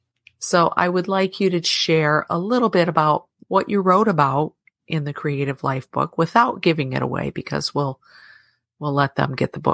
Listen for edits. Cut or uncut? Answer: uncut